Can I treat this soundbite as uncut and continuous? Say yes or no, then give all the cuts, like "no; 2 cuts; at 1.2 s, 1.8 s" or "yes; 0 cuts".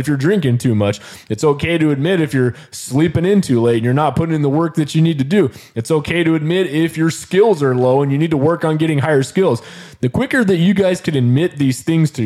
yes; 0 cuts